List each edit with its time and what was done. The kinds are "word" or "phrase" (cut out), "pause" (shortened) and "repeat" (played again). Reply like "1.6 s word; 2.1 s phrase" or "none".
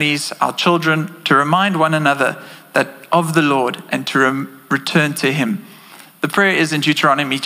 none